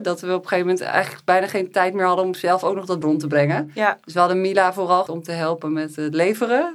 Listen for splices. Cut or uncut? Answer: cut